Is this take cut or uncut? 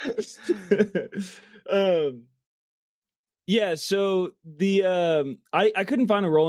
uncut